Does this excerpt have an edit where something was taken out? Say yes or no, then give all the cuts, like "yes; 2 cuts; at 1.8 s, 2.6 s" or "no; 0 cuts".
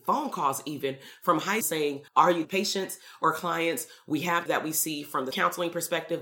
yes; 5 cuts; at 1.6 s, 2.1 s, 2.4 s, 4.5 s, 5.3 s